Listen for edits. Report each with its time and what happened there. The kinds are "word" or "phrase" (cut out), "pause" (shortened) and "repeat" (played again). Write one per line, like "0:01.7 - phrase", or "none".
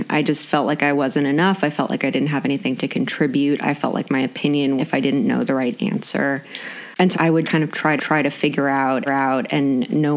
0:04.8 - phrase
0:07.1 - word
0:07.4 - word
0:08.0 - repeat
0:09.1 - repeat